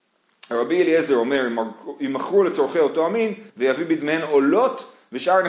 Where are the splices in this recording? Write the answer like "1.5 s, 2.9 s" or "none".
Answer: 3.5 s